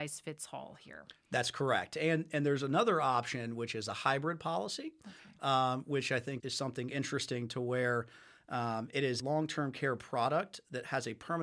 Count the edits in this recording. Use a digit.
2